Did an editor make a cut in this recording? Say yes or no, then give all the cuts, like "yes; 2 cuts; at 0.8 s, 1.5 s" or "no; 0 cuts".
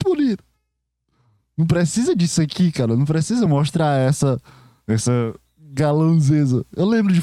no; 0 cuts